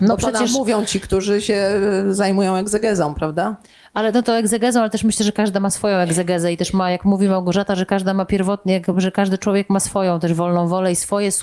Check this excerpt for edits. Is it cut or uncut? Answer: uncut